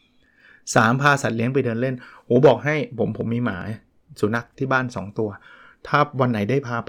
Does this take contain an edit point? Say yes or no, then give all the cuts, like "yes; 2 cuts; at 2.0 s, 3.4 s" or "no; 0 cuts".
no; 0 cuts